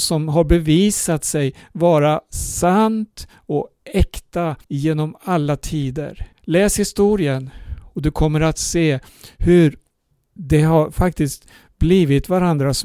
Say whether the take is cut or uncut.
cut